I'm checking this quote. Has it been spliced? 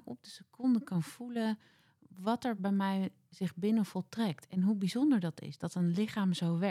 no; 0 cuts

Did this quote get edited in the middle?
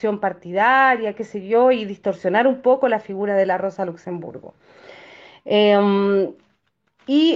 no; 0 cuts

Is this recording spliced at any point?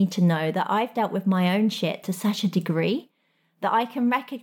no; 0 cuts

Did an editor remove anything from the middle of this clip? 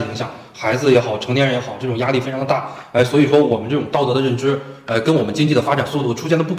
no; 0 cuts

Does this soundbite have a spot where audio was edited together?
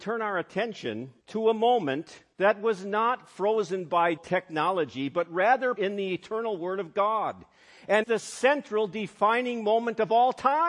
yes; 5 cuts; at 1.2 s, 2.3 s, 4.2 s, 5.8 s, 8.0 s

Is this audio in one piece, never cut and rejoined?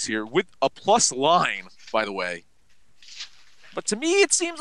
yes; 0 cuts

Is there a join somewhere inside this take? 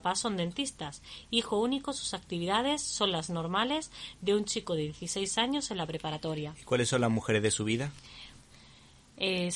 no; 0 cuts

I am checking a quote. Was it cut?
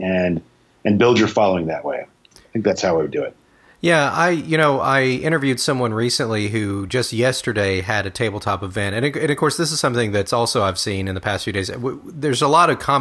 no; 0 cuts

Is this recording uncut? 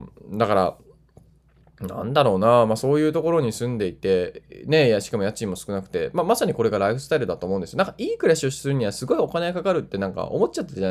yes; 0 cuts

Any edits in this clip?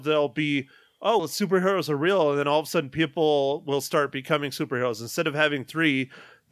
yes; 1 cut; at 1.2 s

